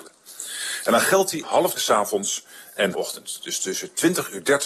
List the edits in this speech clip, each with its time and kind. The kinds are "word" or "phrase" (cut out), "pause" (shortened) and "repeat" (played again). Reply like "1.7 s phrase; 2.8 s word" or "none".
1.4 s phrase; 1.8 s word; 2.9 s phrase